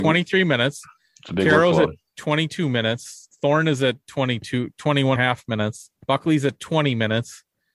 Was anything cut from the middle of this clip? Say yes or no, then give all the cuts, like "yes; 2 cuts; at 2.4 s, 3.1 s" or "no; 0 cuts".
yes; 2 cuts; at 5.2 s, 6.0 s